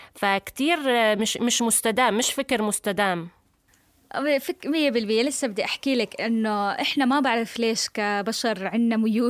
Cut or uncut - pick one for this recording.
uncut